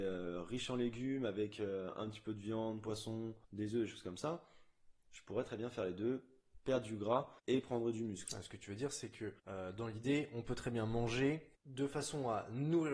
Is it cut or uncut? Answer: cut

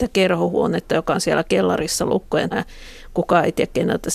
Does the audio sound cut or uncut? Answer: cut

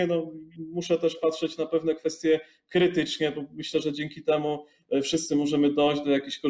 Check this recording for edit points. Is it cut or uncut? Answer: uncut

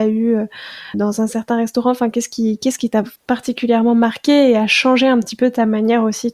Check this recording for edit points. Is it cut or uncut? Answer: cut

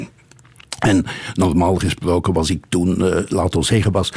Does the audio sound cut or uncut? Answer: uncut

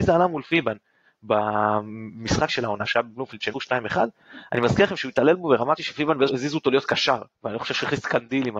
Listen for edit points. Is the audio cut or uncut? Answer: cut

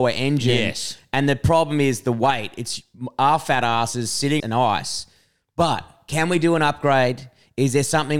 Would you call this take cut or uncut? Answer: cut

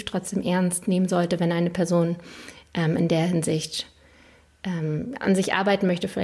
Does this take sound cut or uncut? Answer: uncut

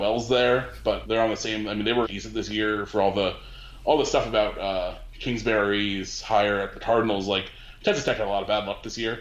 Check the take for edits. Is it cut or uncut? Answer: cut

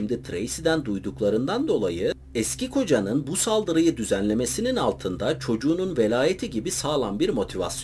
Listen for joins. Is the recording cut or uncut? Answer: uncut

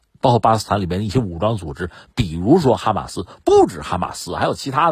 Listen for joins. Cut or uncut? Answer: uncut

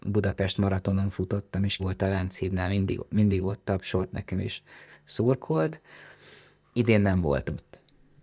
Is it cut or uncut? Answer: cut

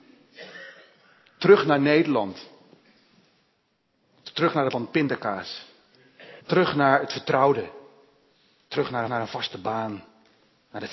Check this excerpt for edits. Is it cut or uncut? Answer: cut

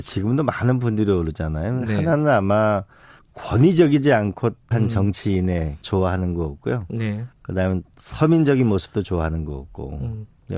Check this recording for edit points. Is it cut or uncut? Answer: cut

